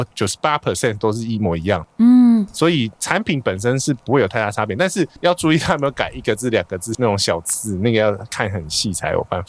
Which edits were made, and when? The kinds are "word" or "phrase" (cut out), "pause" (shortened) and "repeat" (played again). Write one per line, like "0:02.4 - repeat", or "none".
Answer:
0:03.0 - pause
0:05.2 - pause